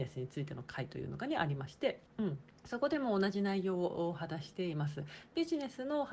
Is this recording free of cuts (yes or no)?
no